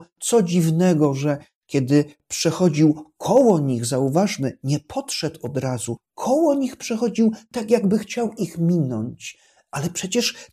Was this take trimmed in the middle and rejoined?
no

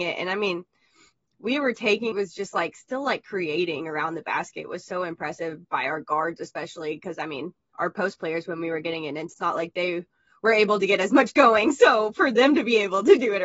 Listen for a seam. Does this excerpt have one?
yes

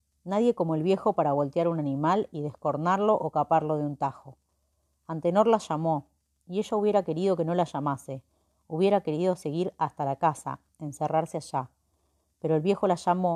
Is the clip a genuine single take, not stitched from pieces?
yes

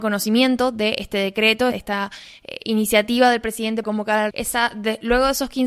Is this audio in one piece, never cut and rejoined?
no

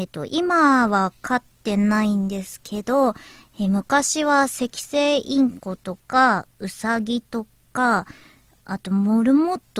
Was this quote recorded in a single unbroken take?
yes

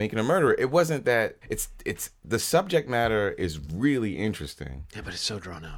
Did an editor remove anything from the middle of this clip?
yes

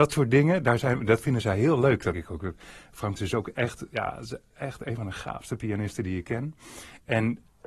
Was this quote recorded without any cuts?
no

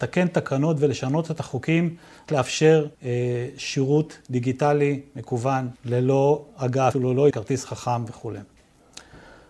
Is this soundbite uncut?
no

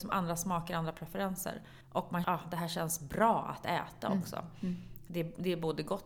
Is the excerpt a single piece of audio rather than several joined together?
no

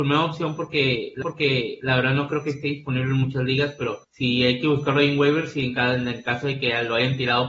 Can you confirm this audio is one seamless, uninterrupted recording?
no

